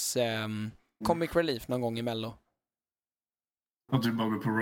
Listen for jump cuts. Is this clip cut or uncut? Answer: cut